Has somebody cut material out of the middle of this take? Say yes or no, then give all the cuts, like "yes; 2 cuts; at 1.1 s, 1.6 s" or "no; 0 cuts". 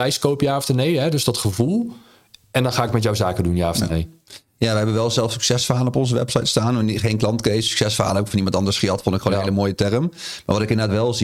no; 0 cuts